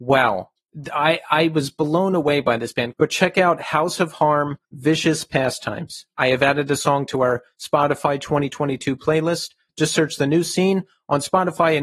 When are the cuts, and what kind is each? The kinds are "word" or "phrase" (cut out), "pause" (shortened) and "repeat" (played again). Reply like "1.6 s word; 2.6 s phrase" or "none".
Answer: 4.6 s pause